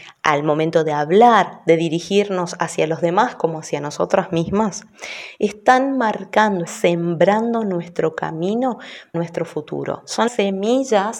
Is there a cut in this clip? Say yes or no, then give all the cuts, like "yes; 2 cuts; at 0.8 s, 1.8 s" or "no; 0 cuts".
yes; 3 cuts; at 6.7 s, 9.1 s, 10.3 s